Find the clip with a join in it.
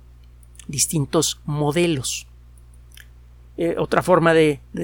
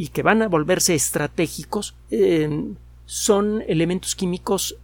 second; 2 cuts; at 2.0 s, 3.6 s

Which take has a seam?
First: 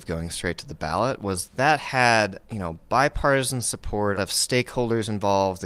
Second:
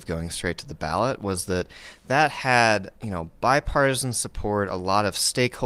first; 2 cuts; at 1.5 s, 4.2 s

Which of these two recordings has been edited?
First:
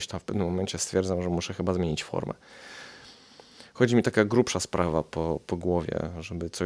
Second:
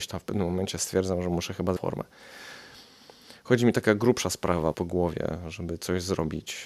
second; 2 cuts; at 1.8 s, 4.7 s

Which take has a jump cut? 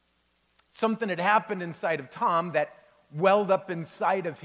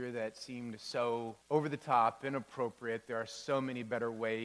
second; 1 cut; at 1.4 s

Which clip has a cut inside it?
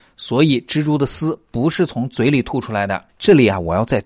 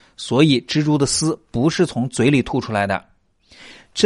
first; 1 cut; at 3.1 s

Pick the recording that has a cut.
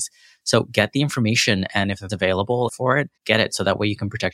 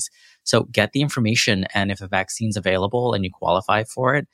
first; 3 cuts; at 2.1 s, 2.7 s, 3.2 s

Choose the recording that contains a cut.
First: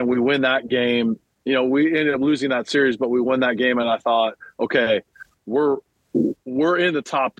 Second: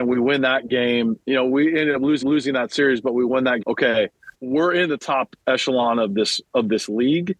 second; 5 cuts; at 1.2 s, 2.2 s, 3.6 s, 4.3 s, 5.4 s

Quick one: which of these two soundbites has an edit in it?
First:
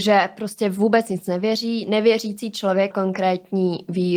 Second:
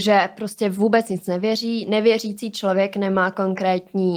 first; 1 cut; at 2.9 s

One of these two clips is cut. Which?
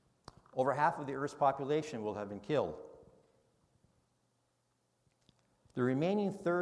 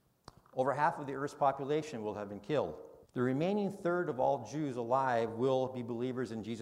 second; 1 cut; at 3.0 s

